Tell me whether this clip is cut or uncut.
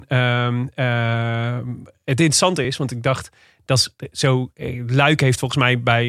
uncut